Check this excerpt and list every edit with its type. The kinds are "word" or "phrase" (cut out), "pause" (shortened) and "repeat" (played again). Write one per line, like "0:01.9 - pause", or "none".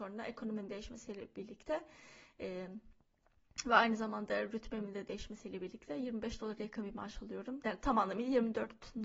none